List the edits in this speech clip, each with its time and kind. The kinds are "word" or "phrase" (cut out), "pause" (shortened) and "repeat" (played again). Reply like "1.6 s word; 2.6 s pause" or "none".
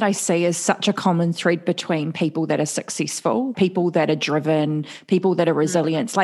3.5 s word